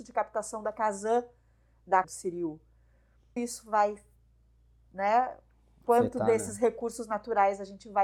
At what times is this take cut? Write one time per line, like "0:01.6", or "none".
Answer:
0:02.0
0:03.4

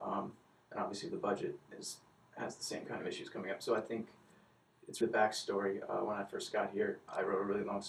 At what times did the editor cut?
0:01.7
0:05.0

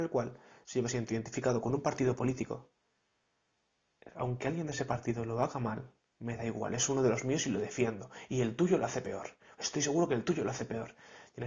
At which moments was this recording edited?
none

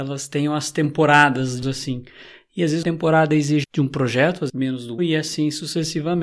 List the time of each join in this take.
0:01.6
0:02.8
0:03.6
0:04.5
0:05.0

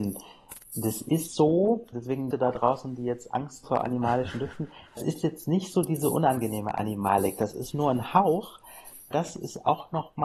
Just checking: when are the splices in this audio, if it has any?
0:01.3
0:01.9
0:02.3
0:03.6
0:05.0
0:07.7
0:09.1

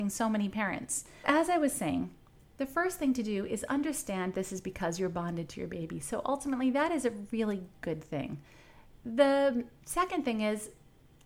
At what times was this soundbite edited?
0:01.2

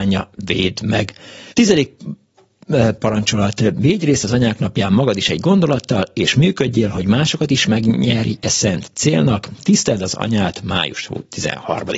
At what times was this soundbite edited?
0:01.5

